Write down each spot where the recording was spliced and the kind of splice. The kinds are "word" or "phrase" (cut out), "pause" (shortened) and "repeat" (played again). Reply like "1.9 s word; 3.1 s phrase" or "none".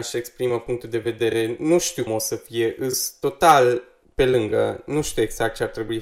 2.1 s word; 4.0 s pause